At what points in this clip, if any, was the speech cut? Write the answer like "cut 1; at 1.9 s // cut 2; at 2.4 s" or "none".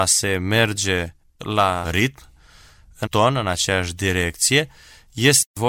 cut 1; at 1.8 s // cut 2; at 3.1 s